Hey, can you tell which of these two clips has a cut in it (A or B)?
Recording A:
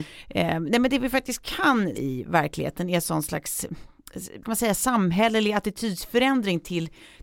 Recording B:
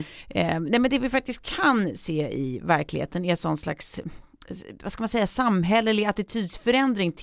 A